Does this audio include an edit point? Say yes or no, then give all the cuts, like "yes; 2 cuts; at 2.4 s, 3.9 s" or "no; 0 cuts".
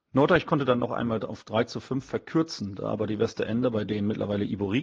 no; 0 cuts